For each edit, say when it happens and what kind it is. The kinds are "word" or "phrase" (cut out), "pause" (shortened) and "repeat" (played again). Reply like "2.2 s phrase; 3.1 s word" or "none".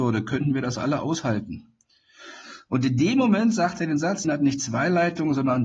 4.2 s word